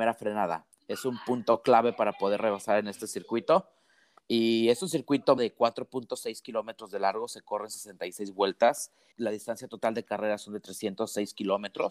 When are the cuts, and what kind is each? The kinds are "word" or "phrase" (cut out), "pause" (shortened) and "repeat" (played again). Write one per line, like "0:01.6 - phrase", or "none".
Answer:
0:05.4 - word
0:09.1 - word